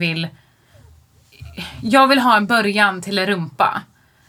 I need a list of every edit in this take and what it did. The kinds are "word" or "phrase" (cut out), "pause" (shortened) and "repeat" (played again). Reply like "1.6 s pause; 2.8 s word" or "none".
none